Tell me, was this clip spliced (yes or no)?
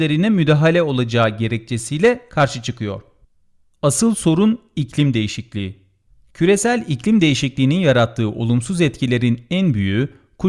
no